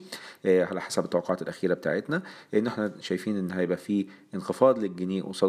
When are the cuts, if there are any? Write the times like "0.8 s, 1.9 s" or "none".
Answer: none